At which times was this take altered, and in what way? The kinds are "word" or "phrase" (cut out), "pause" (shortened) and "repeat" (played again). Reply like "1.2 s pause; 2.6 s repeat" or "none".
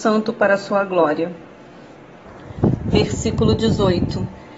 none